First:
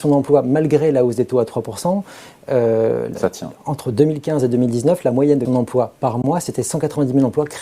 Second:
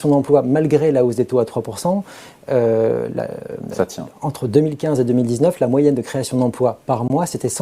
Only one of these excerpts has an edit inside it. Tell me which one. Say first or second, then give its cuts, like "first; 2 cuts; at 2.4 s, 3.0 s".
first; 2 cuts; at 3.1 s, 5.4 s